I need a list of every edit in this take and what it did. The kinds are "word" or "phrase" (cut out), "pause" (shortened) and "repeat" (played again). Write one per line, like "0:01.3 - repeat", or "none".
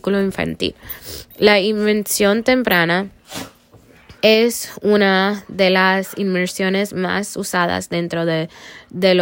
0:04.2 - pause